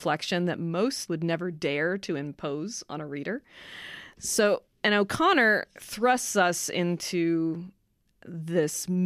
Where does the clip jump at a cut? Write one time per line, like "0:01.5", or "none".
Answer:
0:01.1